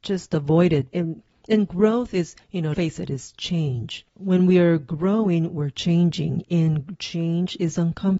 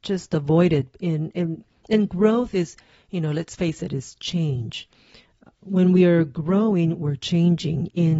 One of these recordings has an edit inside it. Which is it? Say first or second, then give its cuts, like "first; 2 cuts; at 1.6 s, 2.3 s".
first; 4 cuts; at 0.9 s, 2.4 s, 2.7 s, 4.1 s